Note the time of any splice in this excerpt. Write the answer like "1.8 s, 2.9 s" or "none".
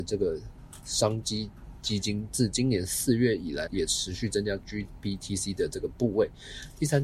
3.7 s